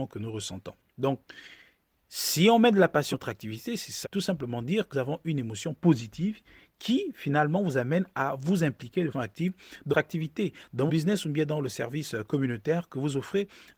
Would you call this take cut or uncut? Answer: cut